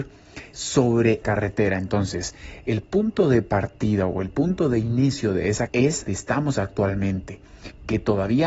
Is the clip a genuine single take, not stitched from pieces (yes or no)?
no